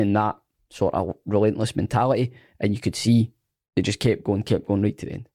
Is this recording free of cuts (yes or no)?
yes